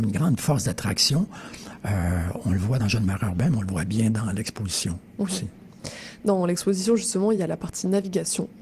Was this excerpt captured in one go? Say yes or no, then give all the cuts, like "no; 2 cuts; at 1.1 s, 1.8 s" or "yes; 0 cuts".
yes; 0 cuts